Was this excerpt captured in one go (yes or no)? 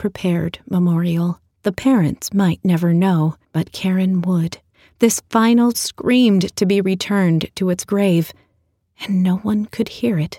no